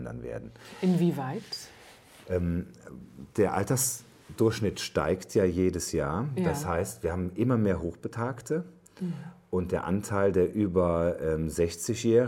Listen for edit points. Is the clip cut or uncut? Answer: uncut